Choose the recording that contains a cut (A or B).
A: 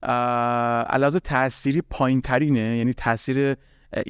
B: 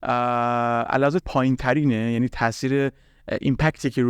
B